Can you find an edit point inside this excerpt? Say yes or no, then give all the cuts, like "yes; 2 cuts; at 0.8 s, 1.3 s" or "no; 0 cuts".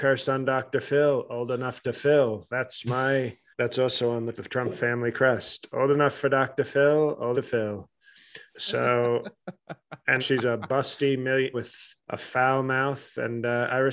yes; 7 cuts; at 3.5 s, 4.3 s, 7.3 s, 8.5 s, 10.2 s, 11.5 s, 12.0 s